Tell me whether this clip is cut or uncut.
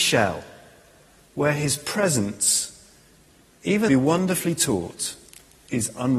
cut